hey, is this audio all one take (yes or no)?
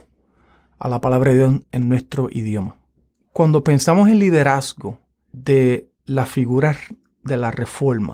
no